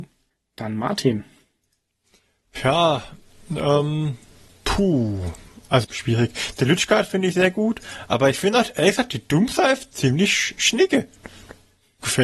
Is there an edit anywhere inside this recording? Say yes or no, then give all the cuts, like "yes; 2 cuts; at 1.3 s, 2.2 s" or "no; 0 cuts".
yes; 1 cut; at 5.8 s